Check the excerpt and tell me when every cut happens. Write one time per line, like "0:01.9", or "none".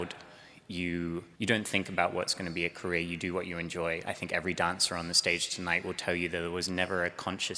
0:01.3